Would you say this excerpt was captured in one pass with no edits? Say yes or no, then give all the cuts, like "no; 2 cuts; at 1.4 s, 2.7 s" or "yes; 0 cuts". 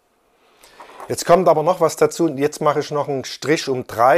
yes; 0 cuts